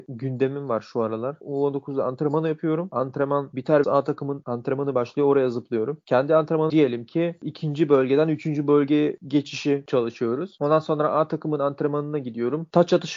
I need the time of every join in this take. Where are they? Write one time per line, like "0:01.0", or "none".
0:03.8
0:06.7